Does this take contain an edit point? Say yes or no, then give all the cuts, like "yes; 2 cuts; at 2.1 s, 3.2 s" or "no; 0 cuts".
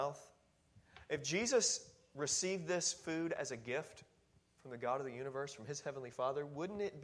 no; 0 cuts